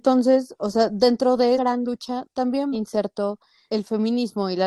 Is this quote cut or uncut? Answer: cut